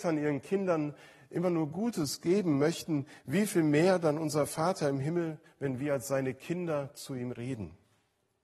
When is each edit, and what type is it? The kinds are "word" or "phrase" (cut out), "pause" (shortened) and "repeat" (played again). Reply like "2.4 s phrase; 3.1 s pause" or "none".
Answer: none